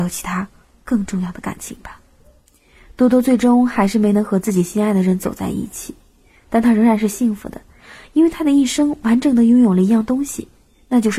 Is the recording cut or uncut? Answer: uncut